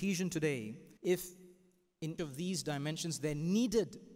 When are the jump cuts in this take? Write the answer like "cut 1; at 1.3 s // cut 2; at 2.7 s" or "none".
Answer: cut 1; at 1.0 s // cut 2; at 2.2 s